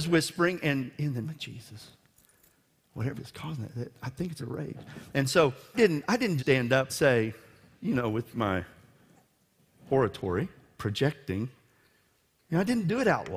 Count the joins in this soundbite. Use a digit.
7